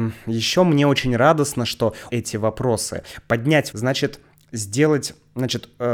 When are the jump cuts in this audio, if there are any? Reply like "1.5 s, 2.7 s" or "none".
2.1 s, 3.7 s